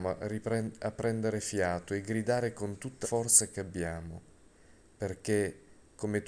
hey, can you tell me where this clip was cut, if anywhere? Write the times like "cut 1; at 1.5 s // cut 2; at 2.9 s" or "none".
cut 1; at 3.0 s